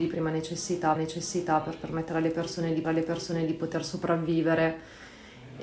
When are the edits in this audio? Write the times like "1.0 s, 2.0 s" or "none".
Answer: 1.0 s, 2.8 s